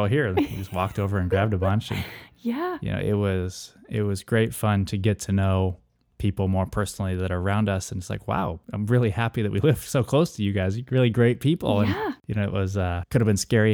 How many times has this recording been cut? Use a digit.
0